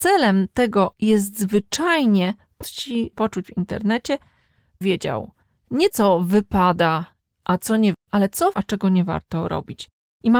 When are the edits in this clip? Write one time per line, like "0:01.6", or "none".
0:00.9
0:02.6
0:03.1
0:03.4
0:04.8
0:05.9
0:07.9
0:08.5

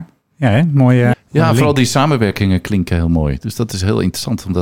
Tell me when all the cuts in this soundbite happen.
0:01.1

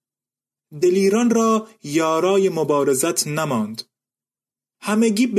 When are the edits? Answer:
none

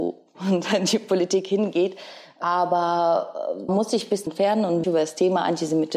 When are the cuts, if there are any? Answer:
0:03.7
0:04.3
0:04.8

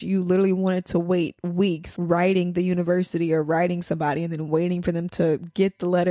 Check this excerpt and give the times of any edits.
0:01.9

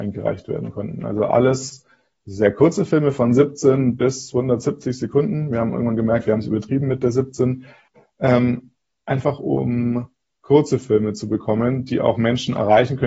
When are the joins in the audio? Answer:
none

